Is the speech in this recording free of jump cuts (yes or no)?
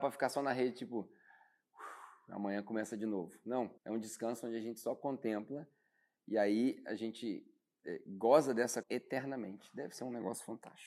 no